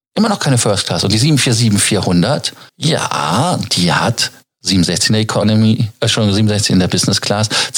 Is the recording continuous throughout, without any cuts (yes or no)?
no